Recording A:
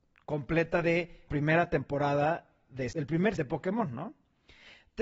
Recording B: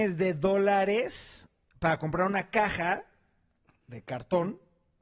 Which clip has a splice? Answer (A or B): A